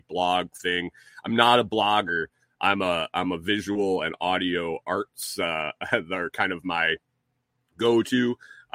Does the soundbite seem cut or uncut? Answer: uncut